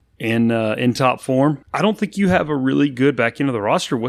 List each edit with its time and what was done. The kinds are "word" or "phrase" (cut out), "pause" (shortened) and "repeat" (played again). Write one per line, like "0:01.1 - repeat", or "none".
0:01.6 - pause

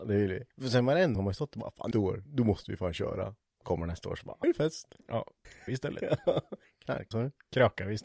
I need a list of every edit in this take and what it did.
0:01.1 - word
0:01.9 - word
0:02.3 - word
0:03.6 - word
0:04.4 - word
0:05.7 - word
0:07.1 - word

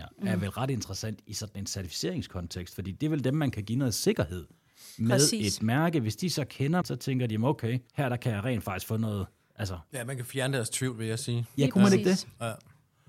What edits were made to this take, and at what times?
0:06.8 - word
0:07.9 - pause

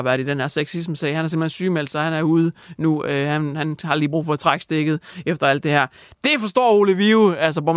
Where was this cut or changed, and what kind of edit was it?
none

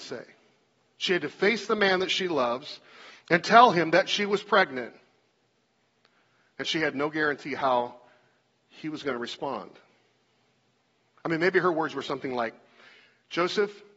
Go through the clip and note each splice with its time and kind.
none

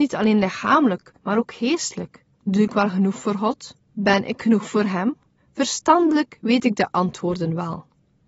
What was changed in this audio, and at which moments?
0:01.2 - pause
0:02.3 - pause
0:03.8 - pause
0:05.4 - pause

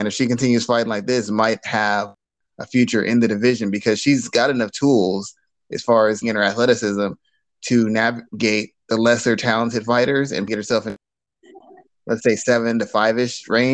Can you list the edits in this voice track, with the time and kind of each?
0:06.2 - phrase
0:08.8 - pause
0:10.5 - word

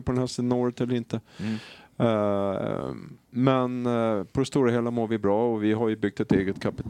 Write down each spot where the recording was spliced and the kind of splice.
0:03.2 - pause

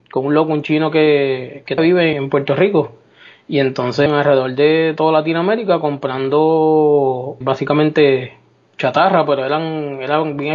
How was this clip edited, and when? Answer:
0:01.8 - word
0:02.1 - word
0:04.1 - word
0:07.4 - word

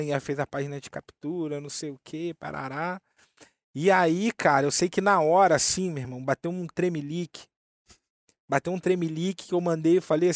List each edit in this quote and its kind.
none

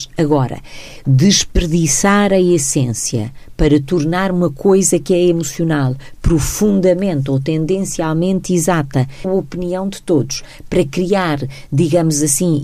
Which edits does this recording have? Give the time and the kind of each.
0:09.2 - word

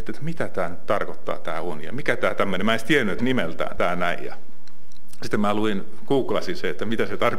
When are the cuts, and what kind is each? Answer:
0:03.2 - phrase
0:03.8 - word

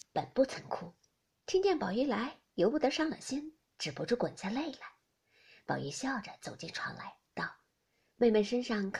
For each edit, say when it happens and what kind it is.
none

